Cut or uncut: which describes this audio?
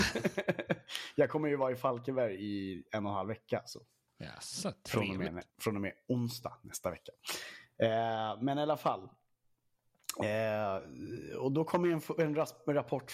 cut